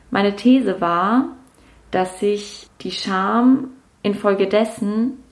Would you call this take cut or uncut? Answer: uncut